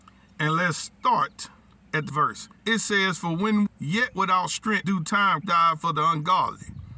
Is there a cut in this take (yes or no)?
yes